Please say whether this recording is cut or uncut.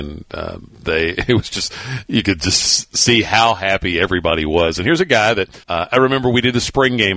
cut